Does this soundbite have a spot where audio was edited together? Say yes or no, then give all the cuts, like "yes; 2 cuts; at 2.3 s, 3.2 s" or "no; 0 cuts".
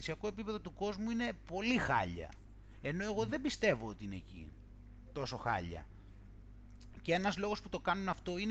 no; 0 cuts